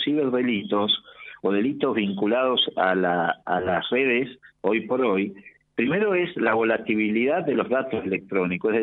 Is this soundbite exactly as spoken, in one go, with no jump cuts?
yes; 0 cuts

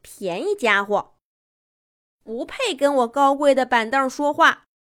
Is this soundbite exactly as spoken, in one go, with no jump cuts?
yes; 0 cuts

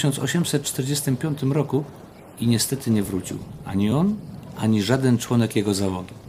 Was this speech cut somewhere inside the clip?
no; 0 cuts

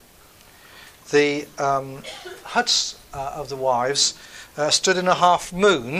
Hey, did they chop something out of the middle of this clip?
no; 0 cuts

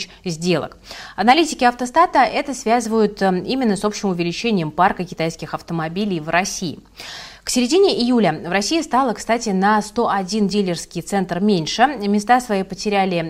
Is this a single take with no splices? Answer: yes; 0 cuts

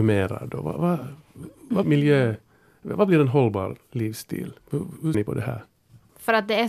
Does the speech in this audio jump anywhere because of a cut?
yes; 3 cuts; at 1.8 s, 4.6 s, 5.1 s

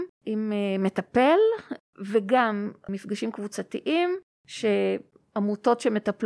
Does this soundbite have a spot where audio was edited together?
no; 0 cuts

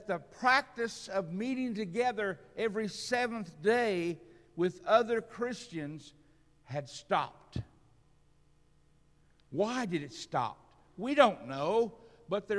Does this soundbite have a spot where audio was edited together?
no; 0 cuts

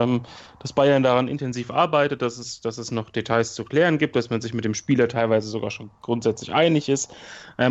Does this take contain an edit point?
no; 0 cuts

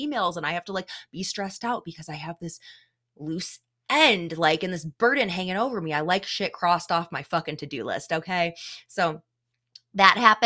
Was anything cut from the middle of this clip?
no; 0 cuts

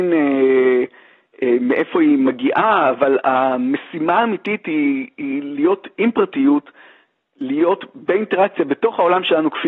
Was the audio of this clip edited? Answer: no; 0 cuts

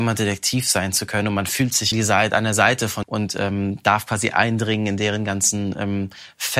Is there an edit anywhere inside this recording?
yes; 2 cuts; at 1.9 s, 3.0 s

